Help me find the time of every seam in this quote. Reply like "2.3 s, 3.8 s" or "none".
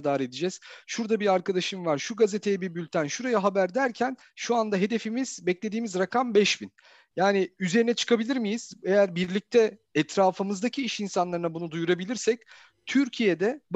none